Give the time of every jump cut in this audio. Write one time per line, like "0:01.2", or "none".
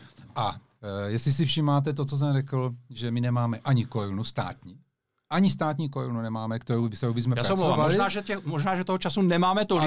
none